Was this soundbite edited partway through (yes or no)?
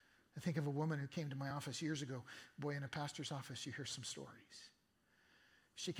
no